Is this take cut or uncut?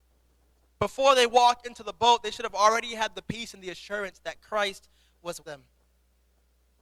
cut